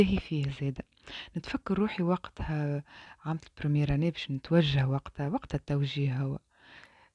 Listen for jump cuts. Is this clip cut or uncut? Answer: uncut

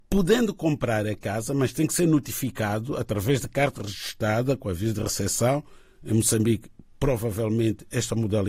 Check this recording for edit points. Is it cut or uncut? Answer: uncut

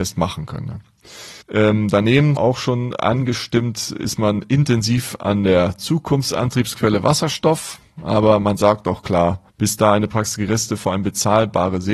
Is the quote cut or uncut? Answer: cut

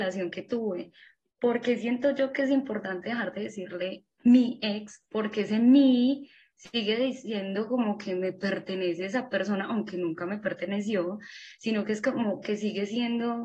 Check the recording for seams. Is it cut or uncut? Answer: uncut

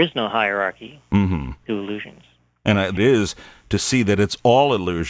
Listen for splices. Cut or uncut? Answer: cut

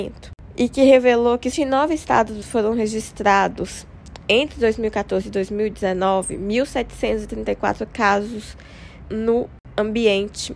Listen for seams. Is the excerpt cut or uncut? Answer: cut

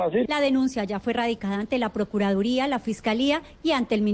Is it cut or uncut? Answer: uncut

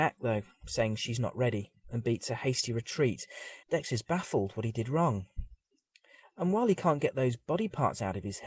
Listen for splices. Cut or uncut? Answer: cut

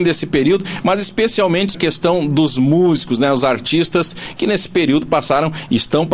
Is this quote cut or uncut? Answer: cut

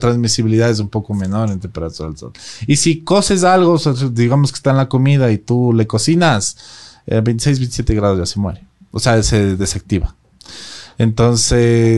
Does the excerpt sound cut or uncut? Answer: uncut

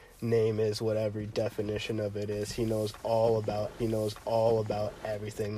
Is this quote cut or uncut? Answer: cut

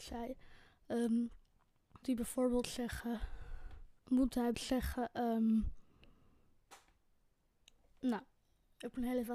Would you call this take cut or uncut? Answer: cut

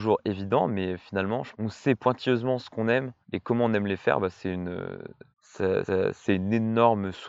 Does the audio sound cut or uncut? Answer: cut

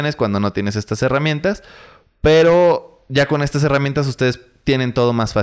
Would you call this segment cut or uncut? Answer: uncut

